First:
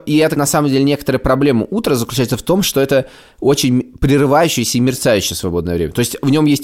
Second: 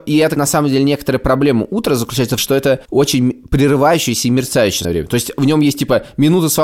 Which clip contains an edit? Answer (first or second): second